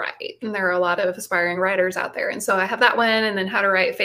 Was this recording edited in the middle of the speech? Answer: no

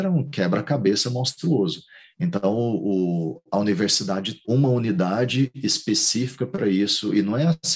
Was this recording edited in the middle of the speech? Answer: yes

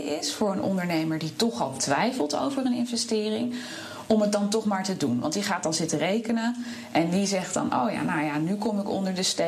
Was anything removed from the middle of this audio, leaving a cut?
no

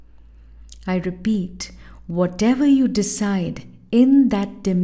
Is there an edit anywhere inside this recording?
no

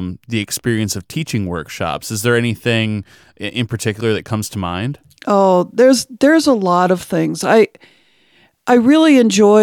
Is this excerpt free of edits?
yes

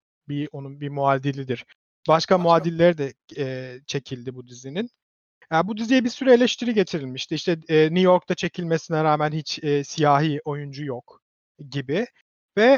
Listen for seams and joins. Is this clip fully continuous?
yes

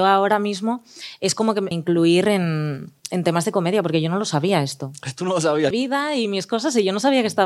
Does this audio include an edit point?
yes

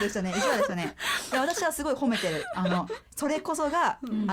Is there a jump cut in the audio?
yes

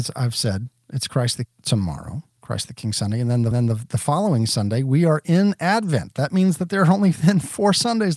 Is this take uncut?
no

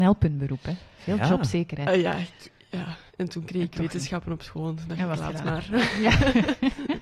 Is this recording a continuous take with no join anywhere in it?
no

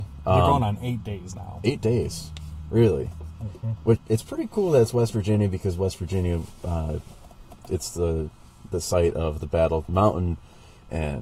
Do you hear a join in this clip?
yes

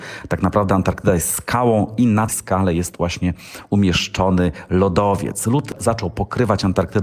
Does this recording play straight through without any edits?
no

